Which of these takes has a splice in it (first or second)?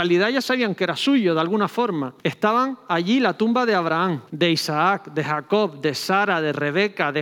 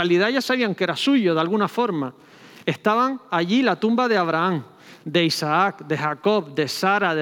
first